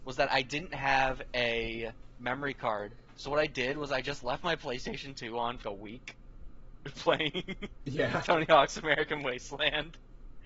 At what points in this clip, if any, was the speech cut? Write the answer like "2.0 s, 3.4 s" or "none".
5.6 s